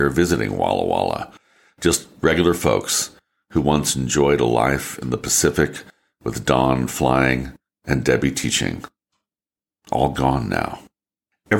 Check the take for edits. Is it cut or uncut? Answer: uncut